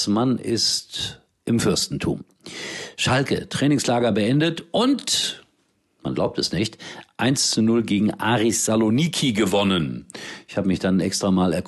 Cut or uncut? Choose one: uncut